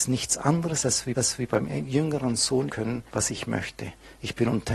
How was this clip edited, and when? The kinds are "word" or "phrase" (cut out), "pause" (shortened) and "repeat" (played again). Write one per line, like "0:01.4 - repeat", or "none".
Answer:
0:01.1 - repeat
0:02.7 - phrase
0:03.1 - pause